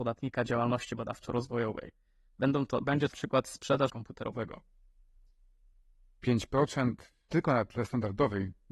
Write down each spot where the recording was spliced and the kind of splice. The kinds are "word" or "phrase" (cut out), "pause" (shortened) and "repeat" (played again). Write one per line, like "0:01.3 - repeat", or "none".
0:03.1 - word
0:03.9 - word
0:07.3 - word